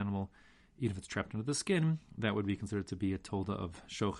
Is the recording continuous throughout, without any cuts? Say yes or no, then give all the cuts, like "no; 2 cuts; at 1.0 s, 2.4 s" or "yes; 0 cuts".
yes; 0 cuts